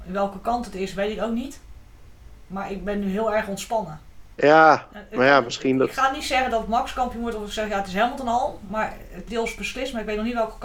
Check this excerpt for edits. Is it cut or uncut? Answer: cut